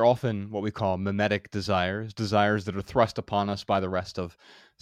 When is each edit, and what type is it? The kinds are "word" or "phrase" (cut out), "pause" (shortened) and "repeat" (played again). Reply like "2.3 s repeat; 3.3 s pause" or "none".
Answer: none